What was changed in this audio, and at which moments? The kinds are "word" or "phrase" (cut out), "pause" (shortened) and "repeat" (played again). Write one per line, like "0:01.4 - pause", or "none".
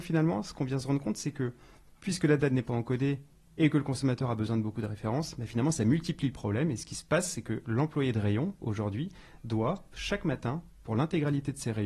none